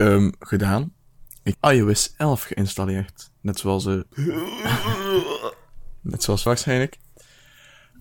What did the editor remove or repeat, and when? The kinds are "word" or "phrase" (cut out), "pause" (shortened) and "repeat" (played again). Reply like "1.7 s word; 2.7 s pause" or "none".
1.5 s word; 6.5 s word